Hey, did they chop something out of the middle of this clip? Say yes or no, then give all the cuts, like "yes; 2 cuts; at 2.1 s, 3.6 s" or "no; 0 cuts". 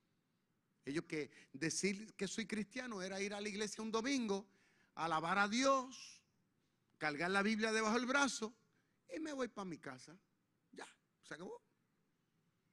yes; 1 cut; at 1.0 s